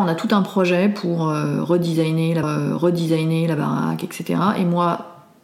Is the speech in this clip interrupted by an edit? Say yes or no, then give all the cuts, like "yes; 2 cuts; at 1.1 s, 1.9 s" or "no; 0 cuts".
yes; 1 cut; at 2.4 s